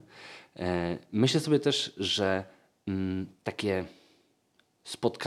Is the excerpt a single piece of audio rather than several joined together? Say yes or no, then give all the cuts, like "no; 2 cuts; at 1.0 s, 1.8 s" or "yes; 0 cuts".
yes; 0 cuts